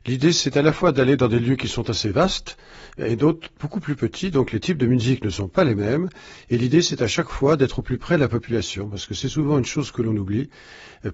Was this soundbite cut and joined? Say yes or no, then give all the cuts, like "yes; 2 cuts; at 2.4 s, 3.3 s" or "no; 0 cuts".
no; 0 cuts